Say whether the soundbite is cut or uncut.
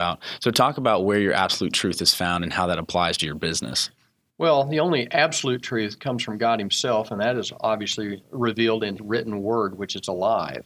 cut